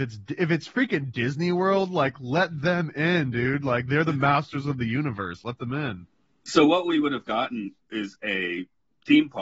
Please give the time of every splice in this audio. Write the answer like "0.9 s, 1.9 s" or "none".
7.8 s